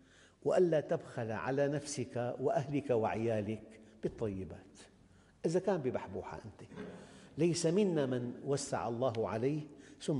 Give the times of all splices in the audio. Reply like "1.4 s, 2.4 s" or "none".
none